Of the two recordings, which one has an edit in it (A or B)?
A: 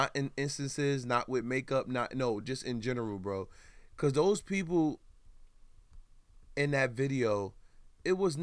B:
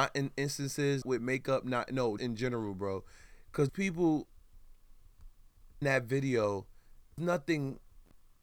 B